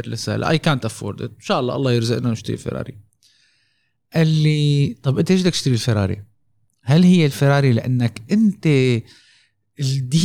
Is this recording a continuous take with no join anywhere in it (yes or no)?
no